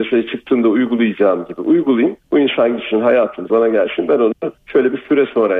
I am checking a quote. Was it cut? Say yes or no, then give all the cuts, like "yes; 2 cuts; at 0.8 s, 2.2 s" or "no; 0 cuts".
yes; 3 cuts; at 2.2 s, 3.5 s, 4.6 s